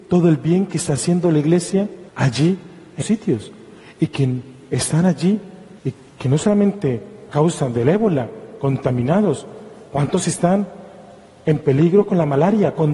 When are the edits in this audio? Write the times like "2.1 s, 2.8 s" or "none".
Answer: 2.1 s, 3.0 s, 5.8 s, 7.3 s